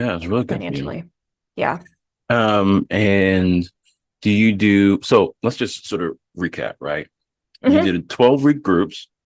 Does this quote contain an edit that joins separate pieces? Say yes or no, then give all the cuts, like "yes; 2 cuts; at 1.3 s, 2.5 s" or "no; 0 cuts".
no; 0 cuts